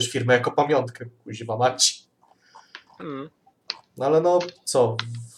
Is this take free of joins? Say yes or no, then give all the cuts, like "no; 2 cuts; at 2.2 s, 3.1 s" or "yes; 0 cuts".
yes; 0 cuts